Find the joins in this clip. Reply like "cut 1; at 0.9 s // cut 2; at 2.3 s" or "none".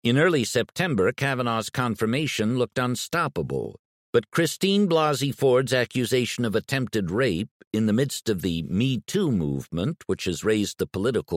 cut 1; at 3.9 s